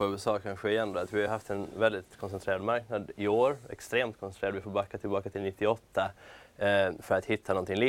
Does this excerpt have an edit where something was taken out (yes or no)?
no